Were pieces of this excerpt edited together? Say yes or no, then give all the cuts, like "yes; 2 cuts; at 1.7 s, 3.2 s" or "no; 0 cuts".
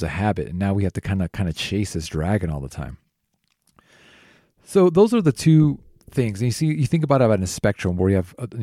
no; 0 cuts